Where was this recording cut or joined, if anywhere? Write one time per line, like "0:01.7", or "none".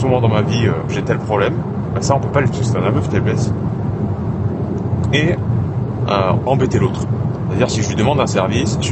0:02.5
0:06.5